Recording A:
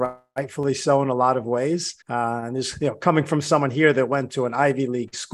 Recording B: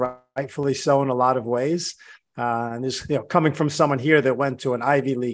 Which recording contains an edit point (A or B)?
A